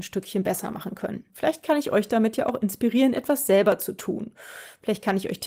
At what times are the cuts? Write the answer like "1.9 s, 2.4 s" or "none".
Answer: 1.3 s